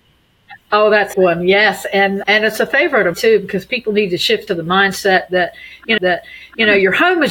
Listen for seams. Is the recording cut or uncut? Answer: cut